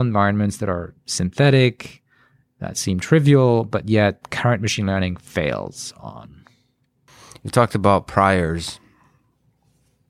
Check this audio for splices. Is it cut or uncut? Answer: uncut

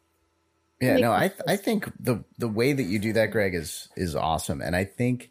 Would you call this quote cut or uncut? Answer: uncut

